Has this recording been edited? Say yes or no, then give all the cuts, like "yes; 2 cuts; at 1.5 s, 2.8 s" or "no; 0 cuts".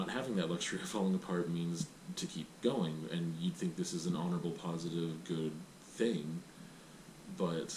no; 0 cuts